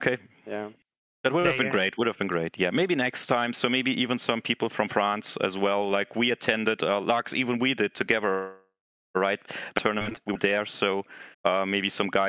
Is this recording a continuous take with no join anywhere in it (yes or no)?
no